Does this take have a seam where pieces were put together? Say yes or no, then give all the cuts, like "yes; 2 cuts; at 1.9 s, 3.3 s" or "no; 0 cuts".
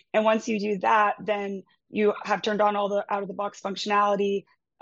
no; 0 cuts